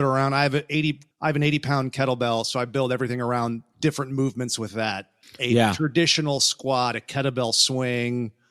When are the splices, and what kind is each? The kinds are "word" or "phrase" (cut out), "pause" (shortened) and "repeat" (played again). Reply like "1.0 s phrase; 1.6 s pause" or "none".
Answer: 1.1 s pause; 5.2 s pause